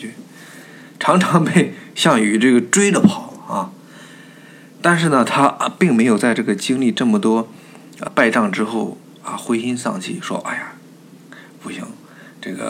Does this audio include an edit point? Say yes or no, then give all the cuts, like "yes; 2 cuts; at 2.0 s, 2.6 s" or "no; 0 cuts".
yes; 1 cut; at 8.1 s